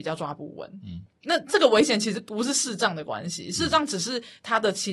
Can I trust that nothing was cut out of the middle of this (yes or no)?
yes